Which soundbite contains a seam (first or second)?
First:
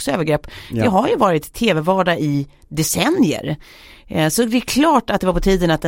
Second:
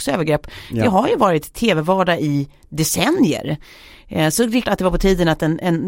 second